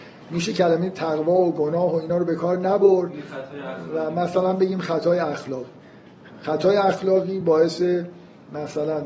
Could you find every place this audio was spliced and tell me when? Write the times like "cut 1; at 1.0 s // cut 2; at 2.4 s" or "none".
none